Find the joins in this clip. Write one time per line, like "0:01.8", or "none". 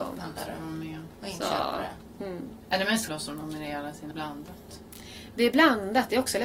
0:03.1
0:04.1